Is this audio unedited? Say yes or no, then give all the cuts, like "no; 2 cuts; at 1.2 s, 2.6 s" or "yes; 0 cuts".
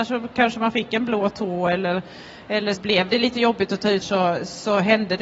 no; 2 cuts; at 2.8 s, 4.0 s